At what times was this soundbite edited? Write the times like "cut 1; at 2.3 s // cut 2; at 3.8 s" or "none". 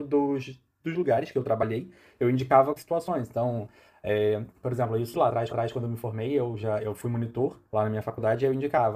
cut 1; at 2.8 s // cut 2; at 4.5 s // cut 3; at 5.1 s // cut 4; at 5.5 s // cut 5; at 7.7 s

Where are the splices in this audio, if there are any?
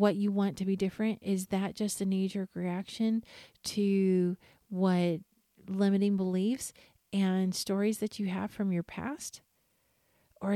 none

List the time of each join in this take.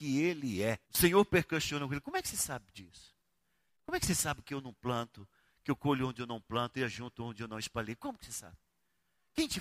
none

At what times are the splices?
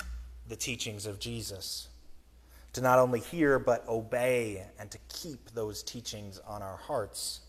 none

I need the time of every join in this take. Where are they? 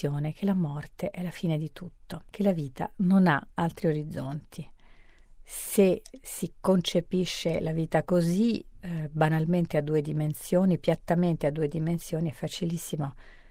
cut 1; at 2.3 s // cut 2; at 3.5 s

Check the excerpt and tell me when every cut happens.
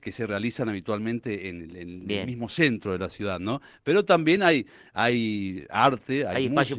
none

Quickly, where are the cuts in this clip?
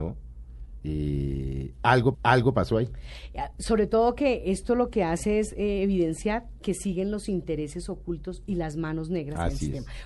cut 1; at 2.1 s

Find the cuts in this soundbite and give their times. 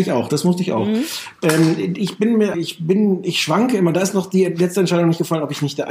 cut 1; at 2.5 s

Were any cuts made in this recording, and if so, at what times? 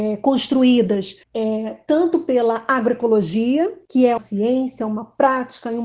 cut 1; at 1.2 s // cut 2; at 3.8 s // cut 3; at 4.2 s

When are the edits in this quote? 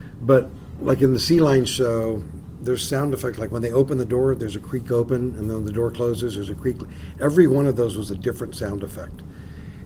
none

